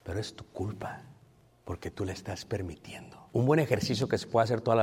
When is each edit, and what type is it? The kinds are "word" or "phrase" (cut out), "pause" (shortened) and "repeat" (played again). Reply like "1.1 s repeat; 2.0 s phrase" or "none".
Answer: 1.5 s pause; 3.3 s pause